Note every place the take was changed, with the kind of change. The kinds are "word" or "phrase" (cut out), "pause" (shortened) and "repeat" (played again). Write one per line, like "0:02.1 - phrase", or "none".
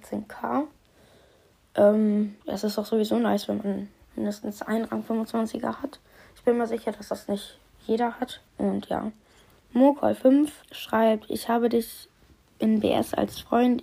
0:02.4 - pause
0:04.0 - pause
0:08.5 - pause
0:10.6 - pause